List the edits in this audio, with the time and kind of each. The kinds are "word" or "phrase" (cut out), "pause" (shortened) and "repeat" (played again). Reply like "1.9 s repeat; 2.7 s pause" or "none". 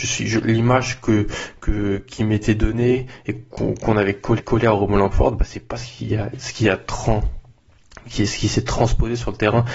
4.4 s repeat